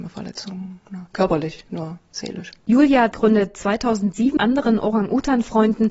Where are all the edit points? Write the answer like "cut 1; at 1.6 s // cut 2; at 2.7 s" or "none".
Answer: cut 1; at 1.7 s // cut 2; at 3.1 s // cut 3; at 4.4 s

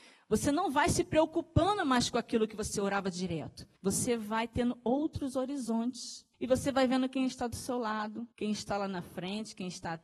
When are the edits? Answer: cut 1; at 3.8 s // cut 2; at 6.3 s // cut 3; at 8.3 s

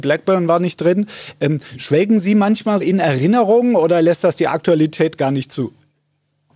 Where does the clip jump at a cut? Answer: cut 1; at 2.8 s

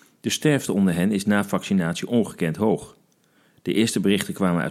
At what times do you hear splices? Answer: none

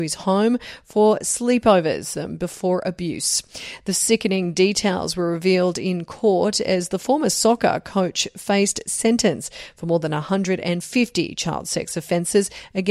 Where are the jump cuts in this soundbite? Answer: cut 1; at 2.1 s

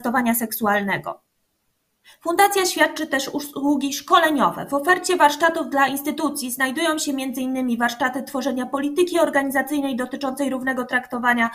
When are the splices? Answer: none

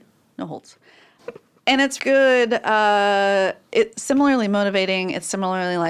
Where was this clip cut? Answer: cut 1; at 1.2 s // cut 2; at 2.0 s // cut 3; at 3.9 s

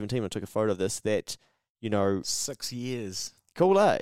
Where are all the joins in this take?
none

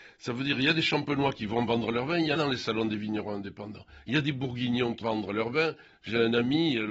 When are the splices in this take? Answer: cut 1; at 2.4 s // cut 2; at 5.0 s

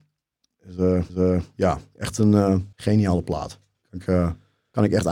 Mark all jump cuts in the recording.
cut 1; at 1.1 s // cut 2; at 2.7 s

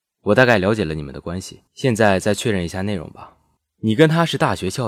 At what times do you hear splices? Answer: cut 1; at 1.7 s // cut 2; at 3.6 s

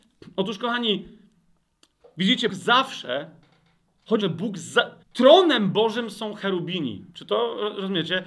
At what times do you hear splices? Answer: cut 1; at 2.5 s // cut 2; at 4.2 s // cut 3; at 5.0 s // cut 4; at 7.1 s

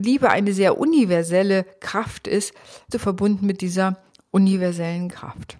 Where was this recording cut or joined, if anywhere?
cut 1; at 2.9 s

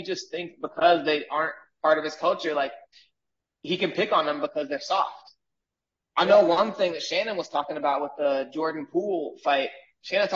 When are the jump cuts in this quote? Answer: none

